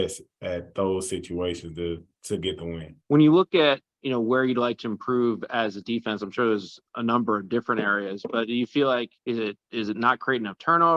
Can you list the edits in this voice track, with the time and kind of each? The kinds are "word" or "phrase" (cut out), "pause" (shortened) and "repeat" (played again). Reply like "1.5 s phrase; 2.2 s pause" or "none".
3.0 s pause; 6.9 s pause; 9.2 s pause